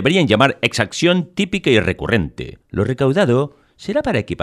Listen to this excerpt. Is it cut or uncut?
cut